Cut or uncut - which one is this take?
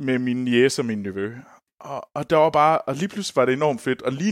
uncut